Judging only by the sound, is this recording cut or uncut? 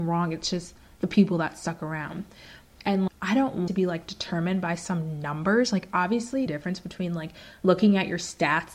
cut